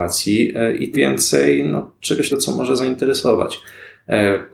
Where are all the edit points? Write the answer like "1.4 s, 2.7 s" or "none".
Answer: 0.9 s, 2.3 s